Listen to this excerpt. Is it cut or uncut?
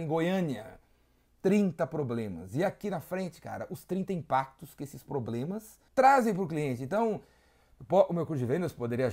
cut